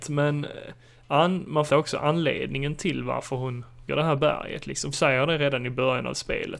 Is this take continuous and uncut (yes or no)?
no